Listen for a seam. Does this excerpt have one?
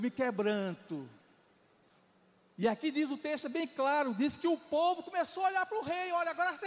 no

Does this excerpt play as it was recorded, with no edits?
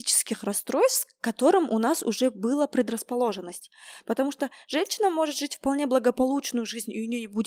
yes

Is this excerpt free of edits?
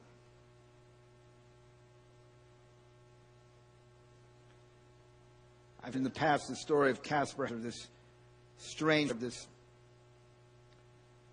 no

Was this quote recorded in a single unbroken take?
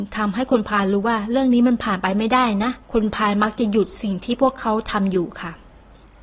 no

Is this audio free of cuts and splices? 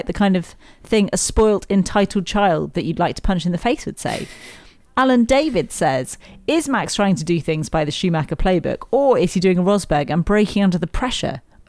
yes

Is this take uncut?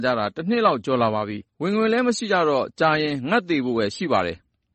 no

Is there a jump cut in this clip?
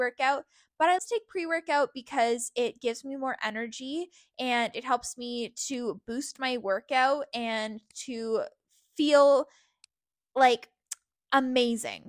yes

